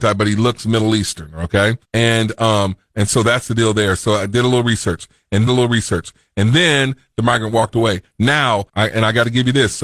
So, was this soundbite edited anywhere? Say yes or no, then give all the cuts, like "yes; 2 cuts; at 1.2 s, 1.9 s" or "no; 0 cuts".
yes; 3 cuts; at 1.8 s, 5.5 s, 8.7 s